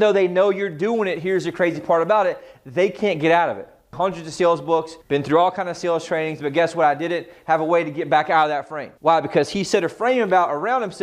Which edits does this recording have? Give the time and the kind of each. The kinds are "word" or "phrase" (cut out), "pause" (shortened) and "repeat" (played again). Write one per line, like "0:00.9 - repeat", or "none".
0:05.0 - pause
0:09.0 - pause